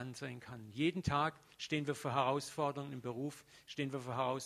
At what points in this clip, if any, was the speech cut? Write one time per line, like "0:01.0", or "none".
none